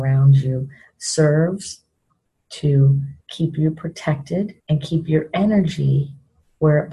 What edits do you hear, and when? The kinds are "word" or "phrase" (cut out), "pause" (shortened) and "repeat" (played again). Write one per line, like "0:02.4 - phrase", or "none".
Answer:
0:03.2 - pause
0:04.6 - pause